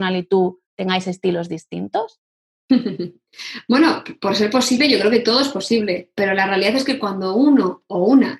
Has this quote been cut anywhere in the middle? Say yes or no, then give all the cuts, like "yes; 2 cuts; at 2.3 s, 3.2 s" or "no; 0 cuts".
no; 0 cuts